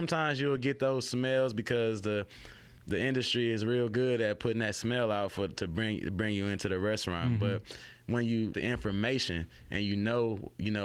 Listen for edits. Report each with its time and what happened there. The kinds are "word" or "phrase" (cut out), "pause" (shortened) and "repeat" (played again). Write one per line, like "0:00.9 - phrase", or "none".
0:08.5 - word